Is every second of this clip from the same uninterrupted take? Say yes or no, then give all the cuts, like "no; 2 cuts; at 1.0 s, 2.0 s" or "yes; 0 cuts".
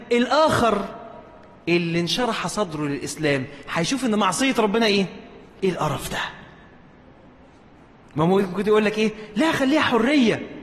yes; 0 cuts